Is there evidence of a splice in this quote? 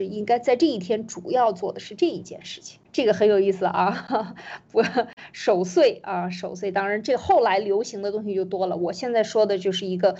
yes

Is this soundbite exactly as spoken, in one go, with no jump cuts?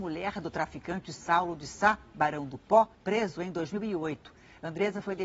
no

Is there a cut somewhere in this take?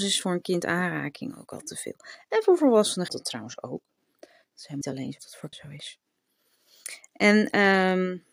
yes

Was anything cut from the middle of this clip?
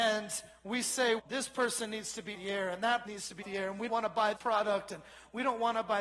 yes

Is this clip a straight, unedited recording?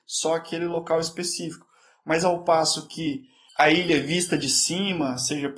yes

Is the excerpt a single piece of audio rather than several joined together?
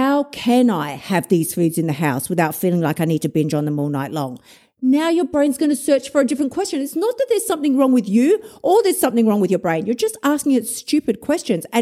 yes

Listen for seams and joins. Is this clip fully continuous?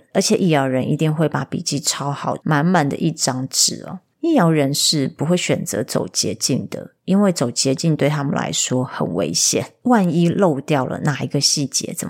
no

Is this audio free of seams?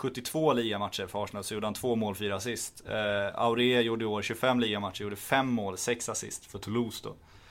yes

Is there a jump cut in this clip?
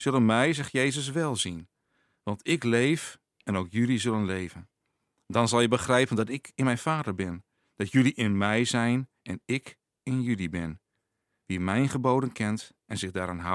no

